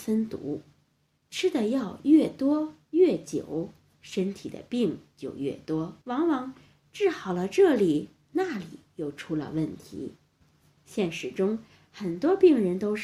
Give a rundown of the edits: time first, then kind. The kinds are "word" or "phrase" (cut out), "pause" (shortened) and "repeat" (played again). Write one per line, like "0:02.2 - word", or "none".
0:06.0 - pause

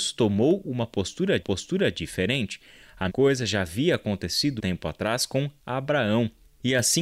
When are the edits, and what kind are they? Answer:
0:01.4 - repeat
0:03.1 - word
0:04.6 - word

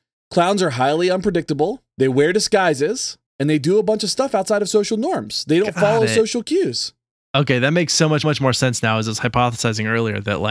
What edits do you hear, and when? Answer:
0:01.9 - pause
0:03.3 - pause
0:08.2 - repeat

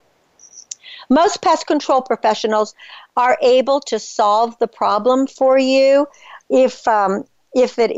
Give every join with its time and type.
none

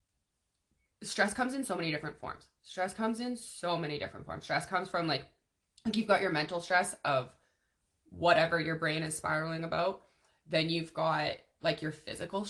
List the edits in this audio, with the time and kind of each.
none

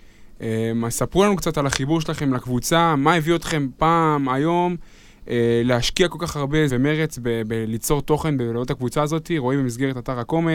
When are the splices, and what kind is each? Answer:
0:06.7 - word

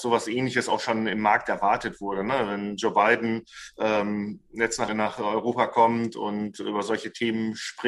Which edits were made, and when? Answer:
0:04.9 - word

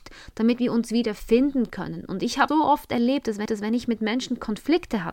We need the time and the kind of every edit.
0:02.5 - word
0:03.5 - repeat

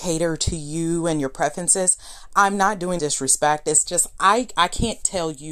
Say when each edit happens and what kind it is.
0:03.0 - phrase

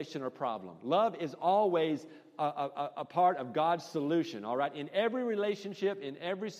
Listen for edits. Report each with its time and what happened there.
none

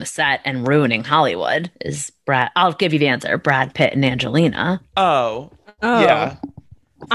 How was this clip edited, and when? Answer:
0:01.7 - pause

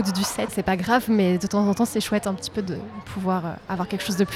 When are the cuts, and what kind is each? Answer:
none

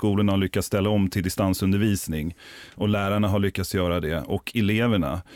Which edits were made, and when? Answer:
none

